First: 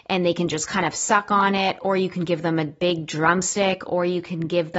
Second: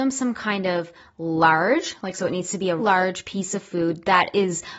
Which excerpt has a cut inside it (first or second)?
second